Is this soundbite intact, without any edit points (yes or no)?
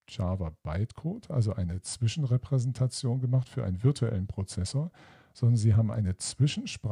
yes